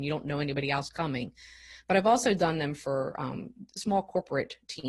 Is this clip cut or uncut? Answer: uncut